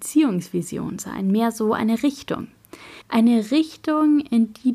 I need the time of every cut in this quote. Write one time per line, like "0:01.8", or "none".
0:03.0